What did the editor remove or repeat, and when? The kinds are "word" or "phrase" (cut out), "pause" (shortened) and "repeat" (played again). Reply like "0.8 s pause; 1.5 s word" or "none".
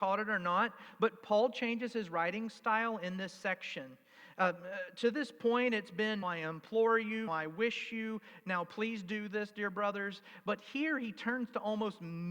6.2 s word; 7.3 s word